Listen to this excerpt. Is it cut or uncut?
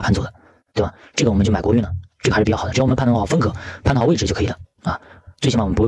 cut